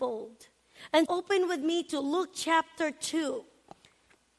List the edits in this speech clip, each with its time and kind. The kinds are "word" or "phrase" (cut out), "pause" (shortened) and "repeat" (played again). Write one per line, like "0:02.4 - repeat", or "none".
0:01.1 - word